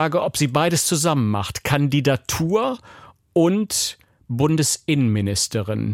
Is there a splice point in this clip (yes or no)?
no